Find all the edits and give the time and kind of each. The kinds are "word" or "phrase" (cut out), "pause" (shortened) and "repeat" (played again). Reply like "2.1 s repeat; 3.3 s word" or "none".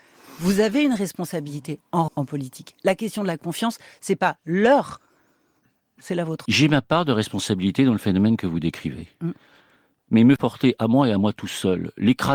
2.1 s word; 6.0 s word; 6.5 s word; 10.4 s word

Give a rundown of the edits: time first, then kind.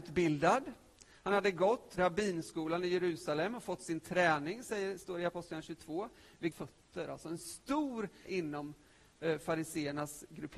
2.0 s word; 6.5 s word; 8.3 s word

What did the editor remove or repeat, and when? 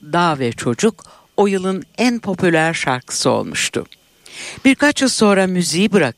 none

